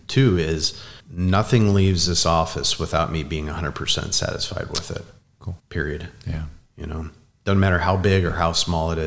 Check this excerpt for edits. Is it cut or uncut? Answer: cut